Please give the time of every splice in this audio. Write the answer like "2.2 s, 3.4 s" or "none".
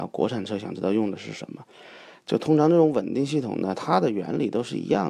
none

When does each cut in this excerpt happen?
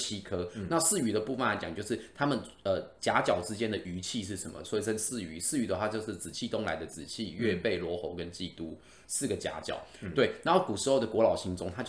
none

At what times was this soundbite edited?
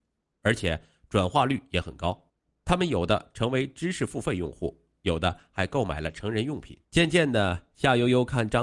2.4 s, 6.8 s

